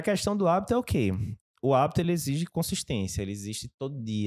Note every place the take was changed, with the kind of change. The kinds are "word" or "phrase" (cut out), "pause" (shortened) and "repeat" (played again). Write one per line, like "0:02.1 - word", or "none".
none